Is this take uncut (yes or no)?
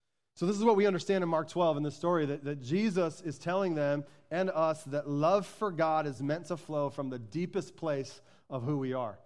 yes